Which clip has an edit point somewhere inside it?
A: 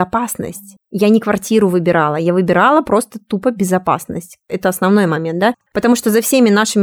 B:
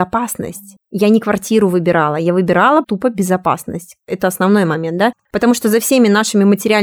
B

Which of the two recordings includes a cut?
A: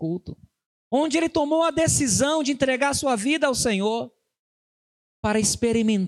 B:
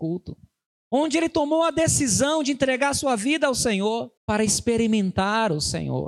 B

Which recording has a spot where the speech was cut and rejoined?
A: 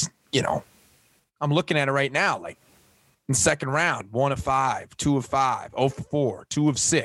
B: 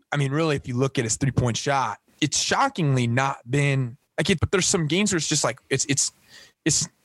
B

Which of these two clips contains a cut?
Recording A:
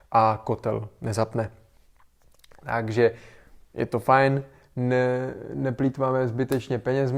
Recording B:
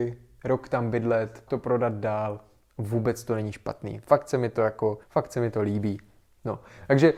B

